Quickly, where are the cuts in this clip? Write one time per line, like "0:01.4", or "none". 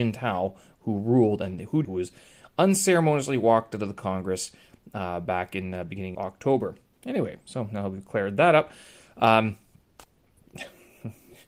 0:01.8
0:06.1